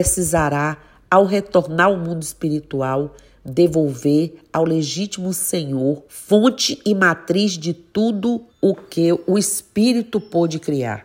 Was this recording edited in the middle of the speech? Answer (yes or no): yes